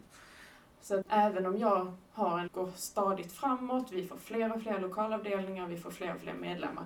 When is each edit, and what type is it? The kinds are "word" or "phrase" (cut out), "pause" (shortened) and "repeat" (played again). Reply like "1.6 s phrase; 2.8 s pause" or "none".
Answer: 1.0 s phrase; 2.5 s phrase